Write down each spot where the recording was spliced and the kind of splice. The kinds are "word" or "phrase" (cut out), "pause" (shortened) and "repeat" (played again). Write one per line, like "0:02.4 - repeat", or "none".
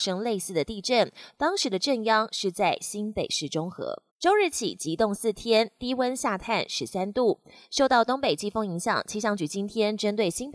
0:04.1 - pause